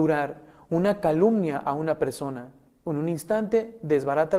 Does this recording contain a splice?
no; 0 cuts

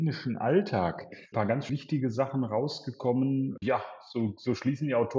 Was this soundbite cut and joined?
yes; 3 cuts; at 1.3 s, 1.7 s, 3.6 s

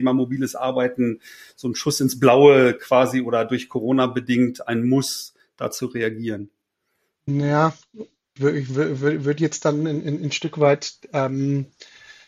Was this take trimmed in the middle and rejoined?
yes; 1 cut; at 8.4 s

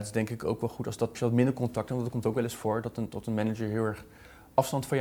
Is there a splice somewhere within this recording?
yes; 1 cut; at 1.1 s

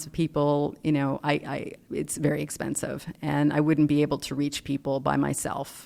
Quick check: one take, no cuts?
yes; 0 cuts

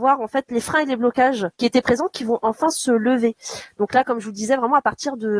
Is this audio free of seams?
no; 1 cut; at 1.5 s

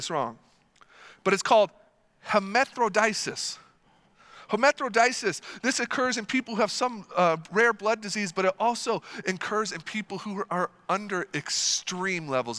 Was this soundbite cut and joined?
no; 0 cuts

